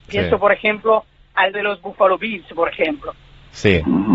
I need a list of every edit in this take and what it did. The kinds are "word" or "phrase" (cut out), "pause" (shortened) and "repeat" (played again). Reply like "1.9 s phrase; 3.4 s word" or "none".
1.5 s word